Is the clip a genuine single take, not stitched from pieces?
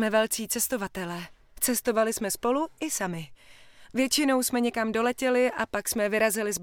yes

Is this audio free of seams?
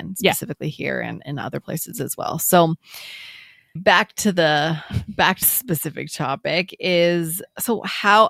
no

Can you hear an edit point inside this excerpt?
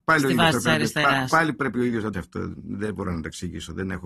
yes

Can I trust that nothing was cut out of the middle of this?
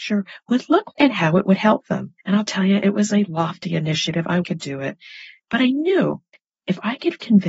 no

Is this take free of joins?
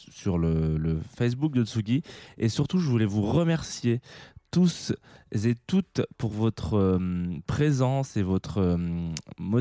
yes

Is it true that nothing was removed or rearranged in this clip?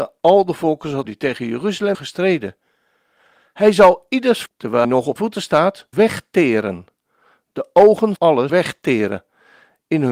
no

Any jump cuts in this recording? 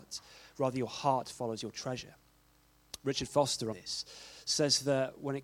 yes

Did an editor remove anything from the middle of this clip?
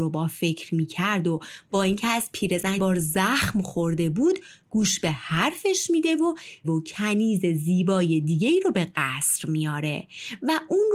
yes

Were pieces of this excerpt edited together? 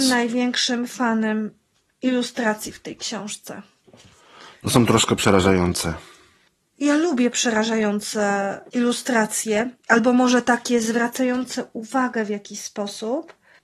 no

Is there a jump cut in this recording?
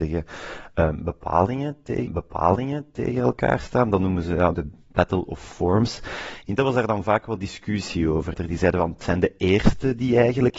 yes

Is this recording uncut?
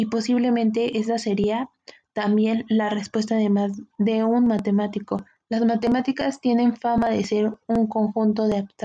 yes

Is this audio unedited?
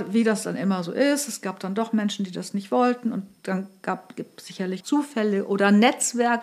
no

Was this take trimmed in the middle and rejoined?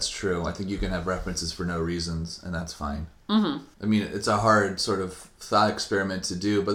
yes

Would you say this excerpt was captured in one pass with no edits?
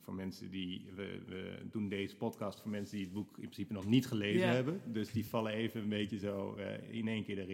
yes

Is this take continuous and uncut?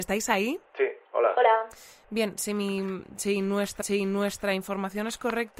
no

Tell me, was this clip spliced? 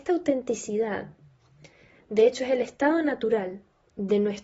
no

